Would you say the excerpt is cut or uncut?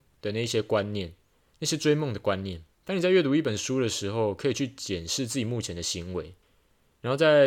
cut